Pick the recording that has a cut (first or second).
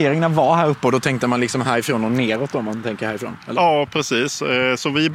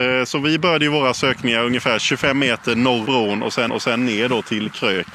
second